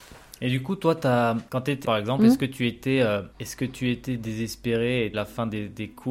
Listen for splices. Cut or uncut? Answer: cut